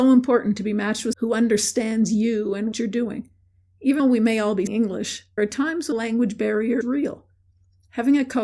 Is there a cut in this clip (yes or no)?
yes